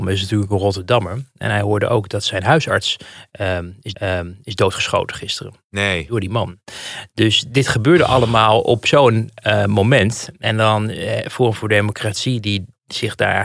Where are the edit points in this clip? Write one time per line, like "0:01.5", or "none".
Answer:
0:03.9